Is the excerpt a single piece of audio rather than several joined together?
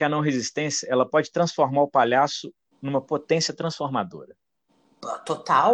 yes; 0 cuts

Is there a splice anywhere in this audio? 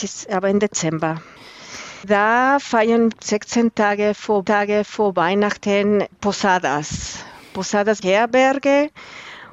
yes; 3 cuts; at 3.1 s, 4.4 s, 8.0 s

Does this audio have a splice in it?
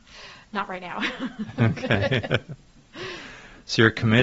no; 0 cuts

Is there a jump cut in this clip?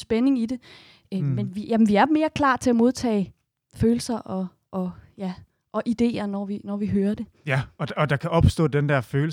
no; 0 cuts

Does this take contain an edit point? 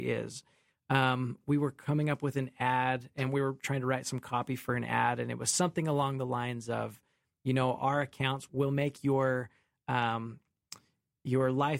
yes; 1 cut; at 8.5 s

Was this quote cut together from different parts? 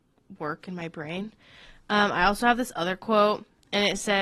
no; 0 cuts

